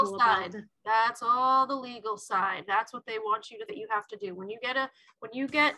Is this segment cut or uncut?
cut